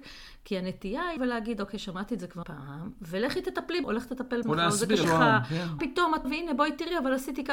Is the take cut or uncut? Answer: cut